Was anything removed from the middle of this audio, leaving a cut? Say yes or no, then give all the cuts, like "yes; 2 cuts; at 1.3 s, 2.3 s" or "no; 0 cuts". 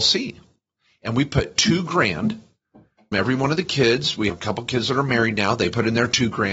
yes; 2 cuts; at 3.1 s, 4.3 s